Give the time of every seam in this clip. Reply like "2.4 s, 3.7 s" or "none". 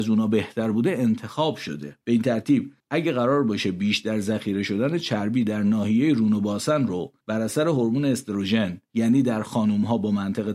2.0 s, 2.8 s, 7.2 s, 8.8 s